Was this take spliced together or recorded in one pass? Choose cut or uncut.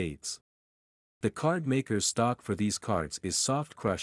uncut